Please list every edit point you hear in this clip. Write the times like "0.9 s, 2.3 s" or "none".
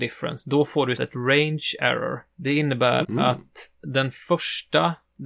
1.0 s, 2.3 s, 3.0 s, 3.7 s